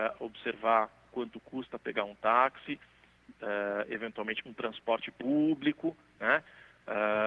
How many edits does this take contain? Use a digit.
1